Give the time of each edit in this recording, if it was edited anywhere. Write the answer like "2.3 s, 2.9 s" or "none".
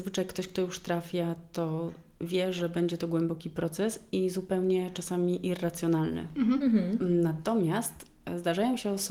none